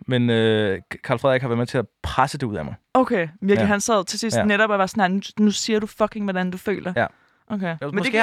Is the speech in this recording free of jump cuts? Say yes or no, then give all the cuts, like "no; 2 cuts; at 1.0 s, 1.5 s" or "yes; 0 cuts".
yes; 0 cuts